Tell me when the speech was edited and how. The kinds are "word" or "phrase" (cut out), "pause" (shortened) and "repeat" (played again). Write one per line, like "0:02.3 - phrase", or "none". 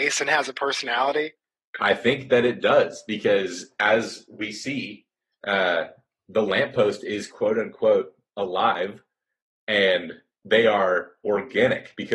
none